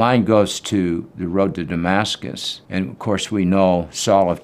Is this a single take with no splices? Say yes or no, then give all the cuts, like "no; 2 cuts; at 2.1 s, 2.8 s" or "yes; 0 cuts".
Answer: no; 1 cut; at 2.7 s